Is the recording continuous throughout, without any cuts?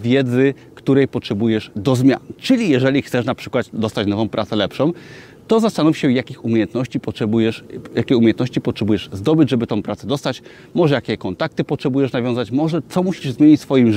yes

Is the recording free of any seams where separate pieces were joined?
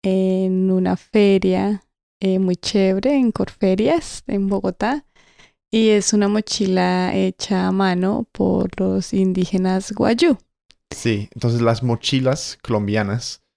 yes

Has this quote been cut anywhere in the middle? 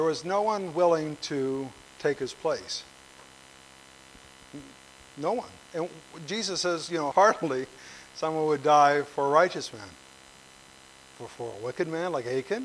yes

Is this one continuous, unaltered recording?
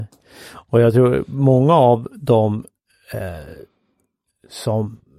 yes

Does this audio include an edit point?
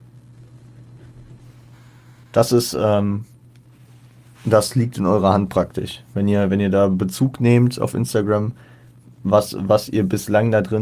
no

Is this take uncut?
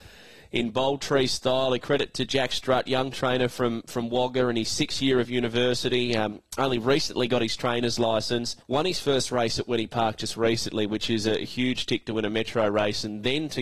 no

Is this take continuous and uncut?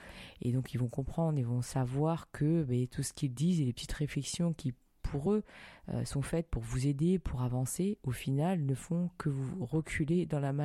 yes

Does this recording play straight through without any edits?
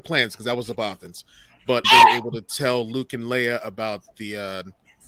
no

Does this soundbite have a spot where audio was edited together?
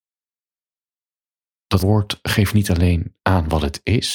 yes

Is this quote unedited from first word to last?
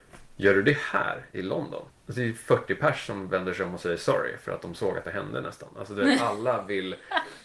yes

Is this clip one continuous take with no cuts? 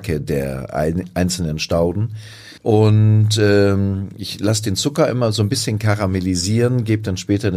no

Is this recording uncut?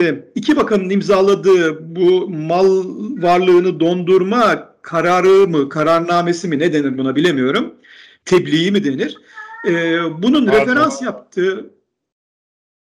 yes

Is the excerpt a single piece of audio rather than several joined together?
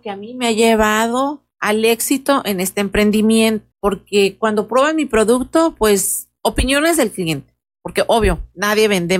no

